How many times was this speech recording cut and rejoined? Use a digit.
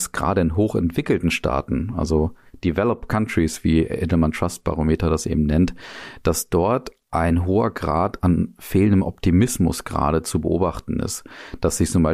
0